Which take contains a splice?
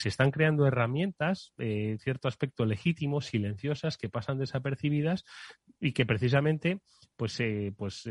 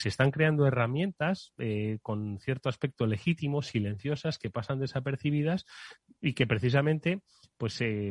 first; 1 cut; at 2.0 s

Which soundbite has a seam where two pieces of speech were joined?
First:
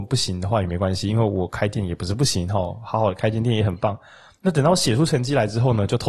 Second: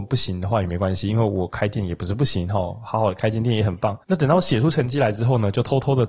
second; 1 cut; at 4.0 s

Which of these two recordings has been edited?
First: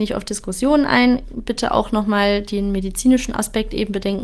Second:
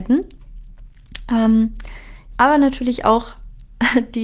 second; 1 cut; at 2.4 s

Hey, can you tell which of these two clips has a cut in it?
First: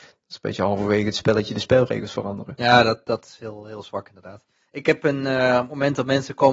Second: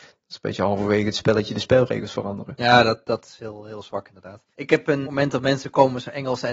second; 2 cuts; at 4.5 s, 5.0 s

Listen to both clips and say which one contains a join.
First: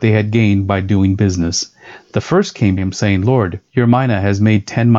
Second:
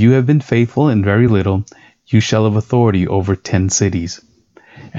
first; 2 cuts; at 2.8 s, 3.7 s

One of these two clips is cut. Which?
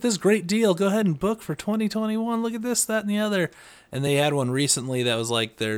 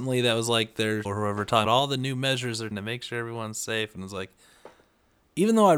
second; 3 cuts; at 1.0 s, 1.6 s, 2.7 s

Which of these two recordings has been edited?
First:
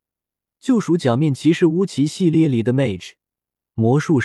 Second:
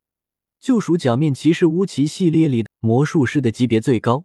second; 1 cut; at 2.7 s

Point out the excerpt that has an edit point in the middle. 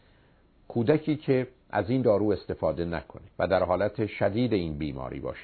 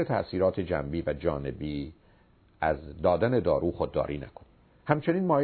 first; 1 cut; at 3.3 s

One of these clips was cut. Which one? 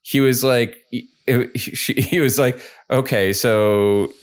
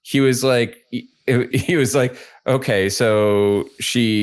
second; 1 cut; at 1.5 s

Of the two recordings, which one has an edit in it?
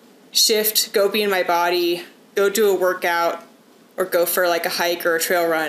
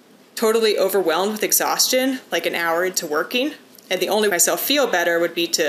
second; 2 cuts; at 3.7 s, 4.3 s

